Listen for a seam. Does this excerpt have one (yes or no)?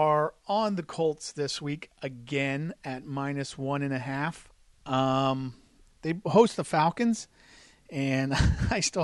no